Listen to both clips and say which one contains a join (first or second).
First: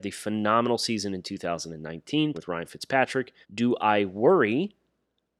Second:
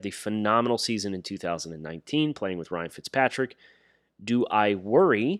first